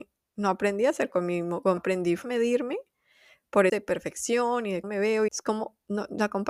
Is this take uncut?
no; 6 cuts; at 1.1 s, 1.8 s, 2.2 s, 3.7 s, 4.8 s, 5.3 s

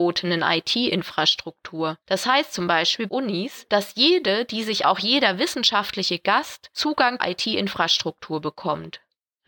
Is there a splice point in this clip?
yes; 4 cuts; at 2.0 s, 3.1 s, 4.8 s, 7.2 s

